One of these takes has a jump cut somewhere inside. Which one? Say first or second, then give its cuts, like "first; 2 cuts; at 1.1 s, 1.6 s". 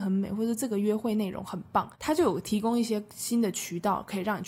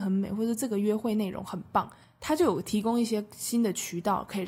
first; 1 cut; at 1.9 s